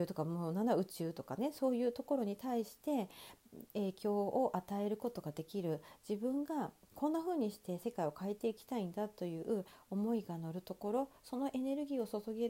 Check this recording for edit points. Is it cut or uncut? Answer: uncut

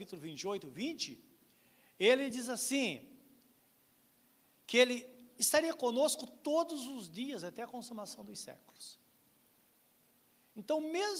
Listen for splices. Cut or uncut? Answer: uncut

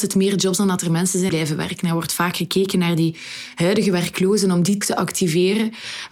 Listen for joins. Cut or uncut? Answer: cut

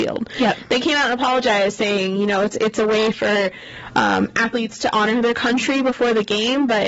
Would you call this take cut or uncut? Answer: uncut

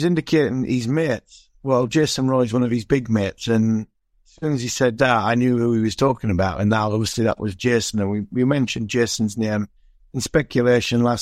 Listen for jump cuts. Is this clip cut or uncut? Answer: uncut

